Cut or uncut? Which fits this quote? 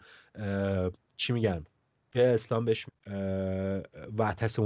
cut